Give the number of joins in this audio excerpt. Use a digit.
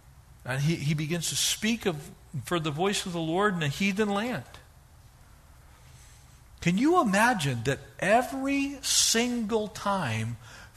0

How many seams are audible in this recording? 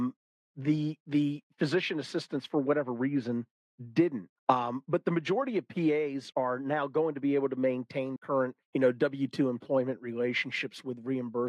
4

